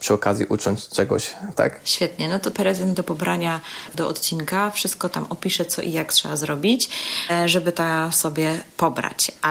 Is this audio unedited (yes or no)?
no